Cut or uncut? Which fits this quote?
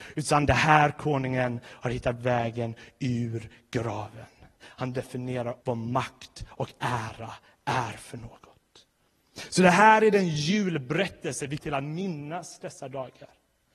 cut